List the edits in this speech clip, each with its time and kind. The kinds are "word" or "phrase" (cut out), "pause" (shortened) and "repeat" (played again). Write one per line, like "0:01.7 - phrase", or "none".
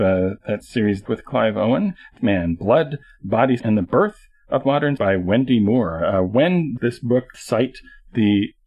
0:01.1 - word
0:02.2 - word
0:03.6 - word
0:05.0 - word
0:06.8 - word
0:07.3 - word